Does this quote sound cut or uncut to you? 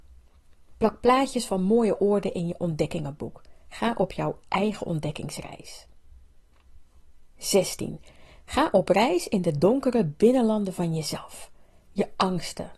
cut